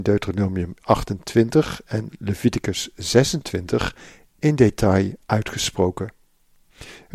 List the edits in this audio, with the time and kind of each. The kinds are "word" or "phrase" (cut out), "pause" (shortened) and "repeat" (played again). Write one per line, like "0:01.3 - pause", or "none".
none